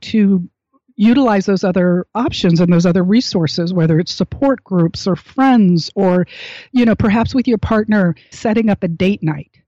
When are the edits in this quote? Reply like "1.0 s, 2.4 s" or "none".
8.3 s